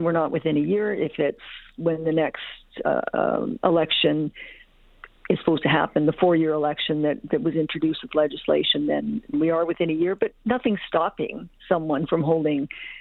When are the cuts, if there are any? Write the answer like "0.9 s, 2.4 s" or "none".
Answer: 9.3 s